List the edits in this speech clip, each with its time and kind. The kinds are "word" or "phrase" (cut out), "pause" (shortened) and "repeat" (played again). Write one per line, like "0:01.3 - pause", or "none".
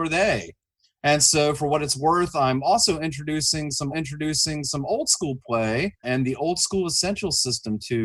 0:03.9 - repeat
0:06.0 - word